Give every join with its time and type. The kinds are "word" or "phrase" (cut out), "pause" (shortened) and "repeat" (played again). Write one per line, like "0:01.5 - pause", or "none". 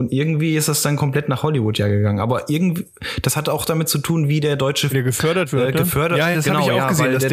0:04.9 - word
0:06.3 - word